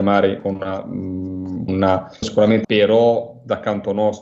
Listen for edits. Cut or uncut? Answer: cut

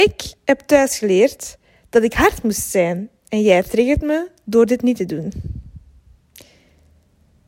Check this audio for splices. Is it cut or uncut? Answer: uncut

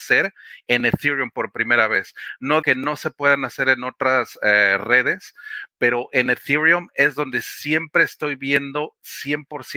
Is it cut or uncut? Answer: cut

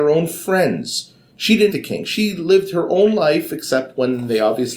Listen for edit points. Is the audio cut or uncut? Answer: cut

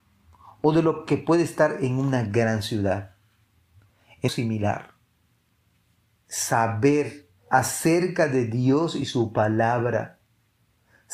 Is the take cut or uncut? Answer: cut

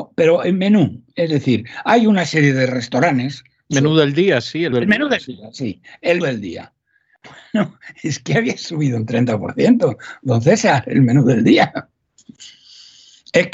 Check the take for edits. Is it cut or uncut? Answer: cut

